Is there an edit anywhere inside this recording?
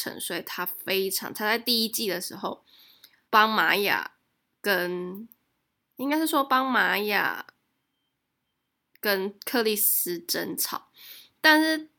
yes; 1 cut; at 3.2 s

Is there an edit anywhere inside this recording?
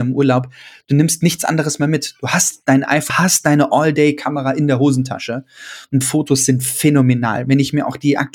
yes; 2 cuts; at 3.1 s, 6.0 s

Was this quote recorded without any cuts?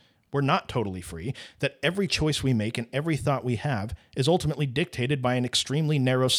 yes; 0 cuts

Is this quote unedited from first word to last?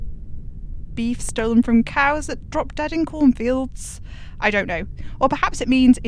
yes; 0 cuts

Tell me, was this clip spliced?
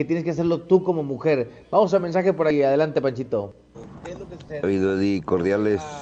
no; 0 cuts

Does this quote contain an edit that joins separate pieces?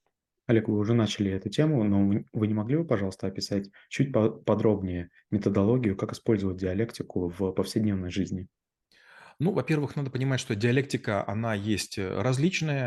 no; 0 cuts

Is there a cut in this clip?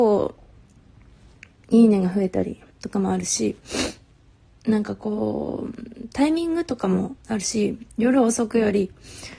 yes; 2 cuts; at 2.7 s, 7.2 s

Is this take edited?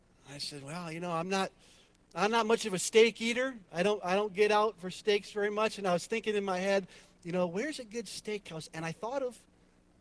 no; 0 cuts

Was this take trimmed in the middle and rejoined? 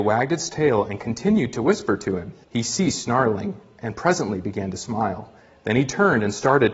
yes; 1 cut; at 2.4 s

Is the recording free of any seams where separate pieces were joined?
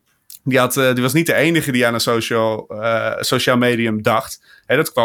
yes; 0 cuts

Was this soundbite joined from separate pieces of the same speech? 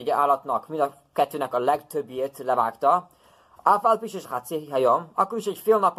yes; 1 cut; at 4.2 s

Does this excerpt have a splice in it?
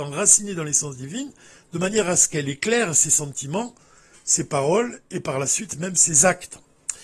no; 0 cuts

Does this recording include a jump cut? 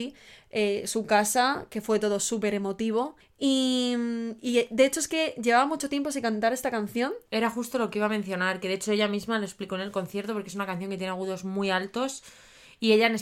yes; 2 cuts; at 3.2 s, 7.3 s

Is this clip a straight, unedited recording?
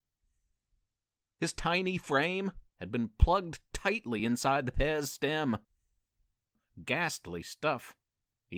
yes; 0 cuts

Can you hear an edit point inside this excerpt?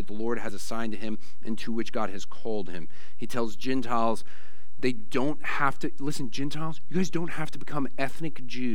no; 0 cuts

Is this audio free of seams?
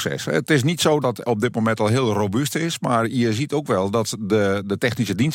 no; 1 cut; at 1.0 s

